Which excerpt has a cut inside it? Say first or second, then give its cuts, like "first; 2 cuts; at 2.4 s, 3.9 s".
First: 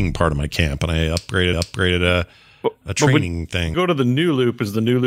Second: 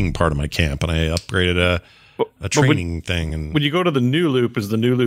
first; 2 cuts; at 1.5 s, 3.7 s